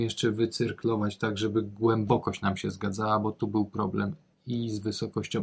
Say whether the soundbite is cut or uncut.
uncut